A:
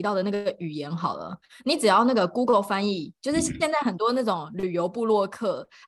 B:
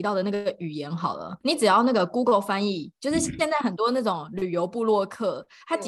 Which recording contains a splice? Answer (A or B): B